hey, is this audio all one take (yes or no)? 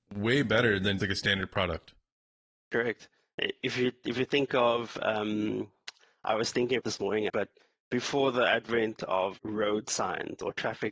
no